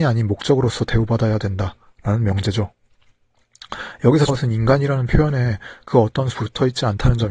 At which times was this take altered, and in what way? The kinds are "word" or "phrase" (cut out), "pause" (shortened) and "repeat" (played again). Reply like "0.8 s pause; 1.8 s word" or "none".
4.3 s word; 6.3 s word